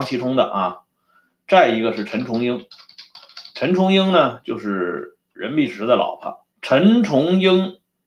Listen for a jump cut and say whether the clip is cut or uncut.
cut